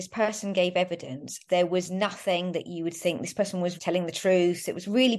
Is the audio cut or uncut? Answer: cut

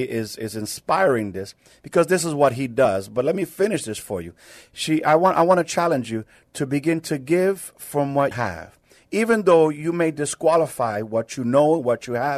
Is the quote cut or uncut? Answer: cut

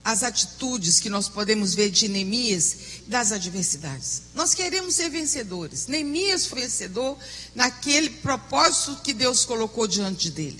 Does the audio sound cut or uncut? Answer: cut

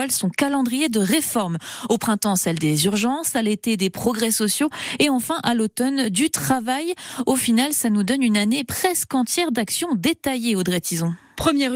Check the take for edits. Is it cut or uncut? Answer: uncut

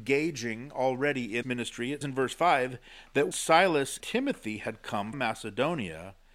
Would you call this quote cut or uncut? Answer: cut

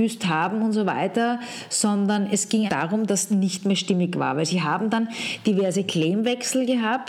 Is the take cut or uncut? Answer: cut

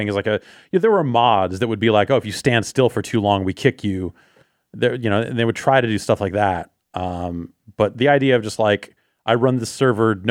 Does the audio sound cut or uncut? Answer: uncut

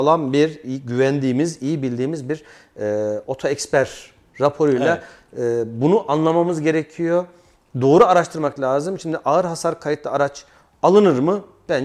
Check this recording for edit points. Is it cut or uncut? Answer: uncut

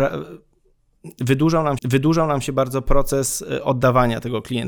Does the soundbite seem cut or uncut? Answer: cut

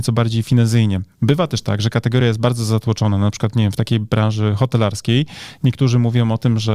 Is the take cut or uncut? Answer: uncut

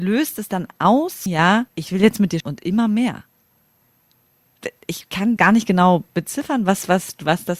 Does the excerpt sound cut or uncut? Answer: cut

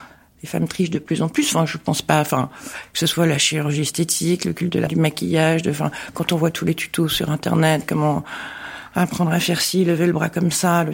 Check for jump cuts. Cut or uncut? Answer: cut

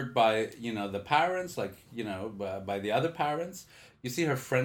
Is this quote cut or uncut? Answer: uncut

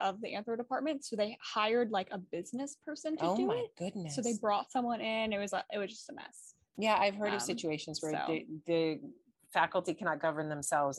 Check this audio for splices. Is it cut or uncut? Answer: uncut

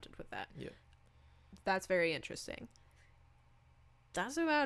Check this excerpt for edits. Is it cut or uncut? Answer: uncut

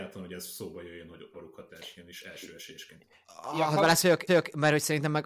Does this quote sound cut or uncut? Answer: cut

